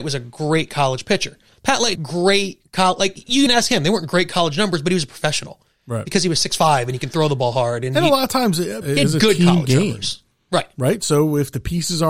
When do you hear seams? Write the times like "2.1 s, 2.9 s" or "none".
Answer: 1.5 s, 2.0 s, 3.5 s, 8.8 s